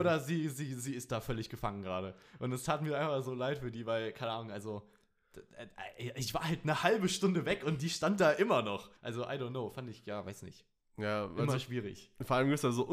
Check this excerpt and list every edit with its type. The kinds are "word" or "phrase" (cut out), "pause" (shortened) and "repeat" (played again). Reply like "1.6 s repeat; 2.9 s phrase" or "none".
9.0 s pause